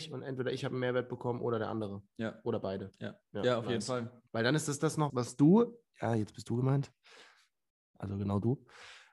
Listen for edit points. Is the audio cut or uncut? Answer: cut